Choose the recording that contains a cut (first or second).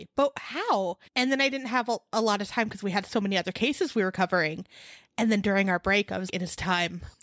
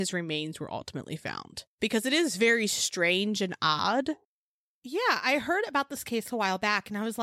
first